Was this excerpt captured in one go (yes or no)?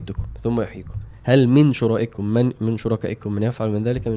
yes